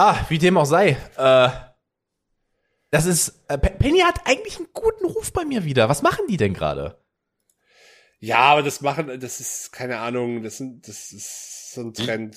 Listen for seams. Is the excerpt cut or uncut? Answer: uncut